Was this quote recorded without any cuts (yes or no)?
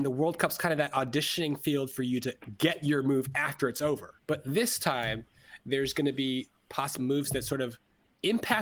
no